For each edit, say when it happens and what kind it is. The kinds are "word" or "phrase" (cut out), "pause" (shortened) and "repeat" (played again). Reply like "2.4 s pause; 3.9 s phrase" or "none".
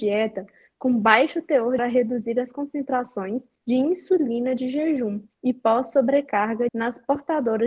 1.8 s phrase; 3.6 s pause; 5.3 s pause; 6.7 s phrase